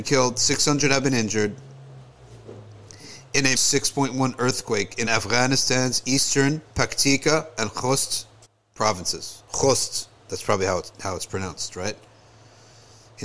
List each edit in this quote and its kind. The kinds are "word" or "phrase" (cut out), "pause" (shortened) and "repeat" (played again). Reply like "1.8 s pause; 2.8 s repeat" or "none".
3.5 s word; 5.1 s phrase; 6.7 s pause; 8.4 s pause; 10.2 s pause